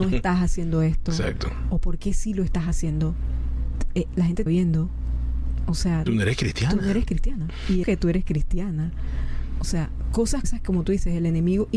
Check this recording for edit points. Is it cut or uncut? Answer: cut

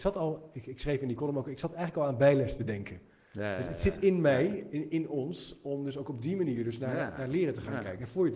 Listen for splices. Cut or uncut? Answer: uncut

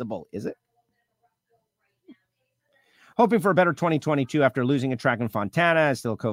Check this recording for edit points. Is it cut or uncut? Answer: uncut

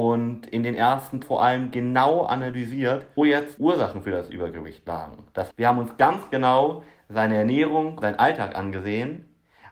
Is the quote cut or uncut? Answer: cut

